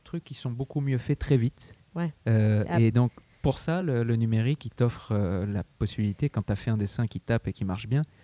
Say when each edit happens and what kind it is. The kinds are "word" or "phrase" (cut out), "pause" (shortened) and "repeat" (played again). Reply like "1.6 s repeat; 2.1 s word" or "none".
none